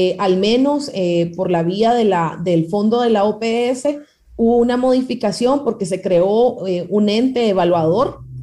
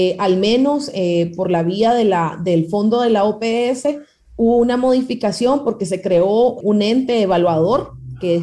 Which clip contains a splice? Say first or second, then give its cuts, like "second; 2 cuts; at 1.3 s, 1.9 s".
second; 1 cut; at 6.6 s